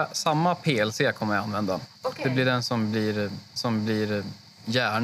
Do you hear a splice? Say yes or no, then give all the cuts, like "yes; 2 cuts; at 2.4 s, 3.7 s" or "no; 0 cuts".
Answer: yes; 2 cuts; at 1.9 s, 3.6 s